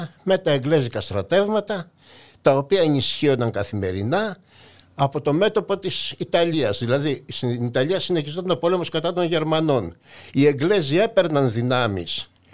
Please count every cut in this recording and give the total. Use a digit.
0